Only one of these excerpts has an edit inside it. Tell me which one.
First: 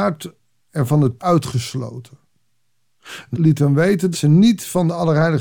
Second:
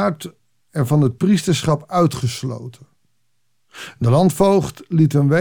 first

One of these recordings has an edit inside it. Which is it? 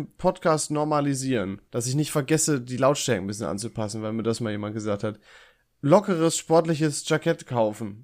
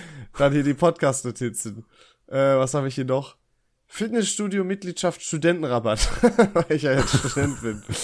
first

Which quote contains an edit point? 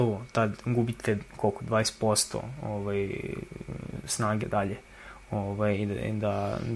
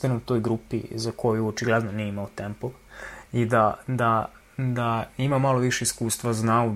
first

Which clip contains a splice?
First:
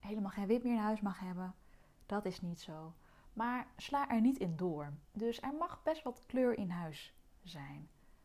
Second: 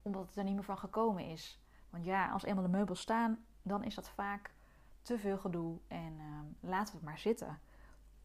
first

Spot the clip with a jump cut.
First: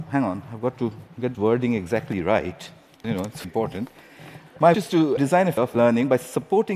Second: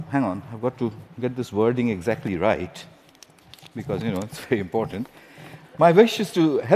first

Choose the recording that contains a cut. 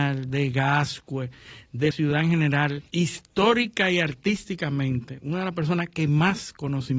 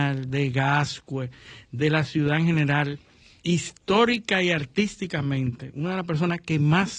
first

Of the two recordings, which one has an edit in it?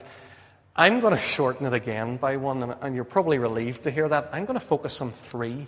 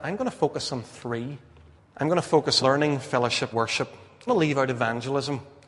second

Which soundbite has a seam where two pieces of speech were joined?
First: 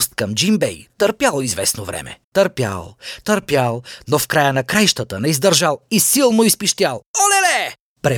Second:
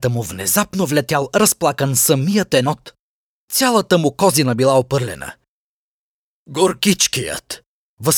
first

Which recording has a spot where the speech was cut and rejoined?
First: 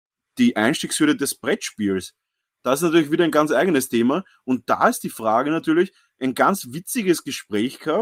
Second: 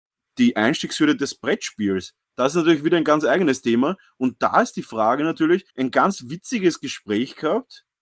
second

